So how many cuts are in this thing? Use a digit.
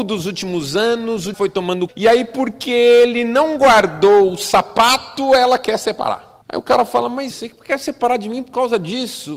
4